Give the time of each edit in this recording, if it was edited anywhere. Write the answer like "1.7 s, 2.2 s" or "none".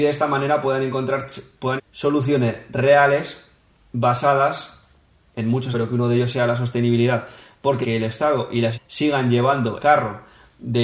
1.8 s, 5.7 s, 7.8 s, 8.7 s, 9.8 s